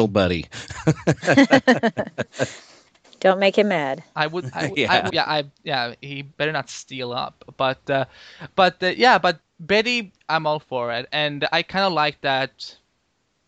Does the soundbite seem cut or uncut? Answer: cut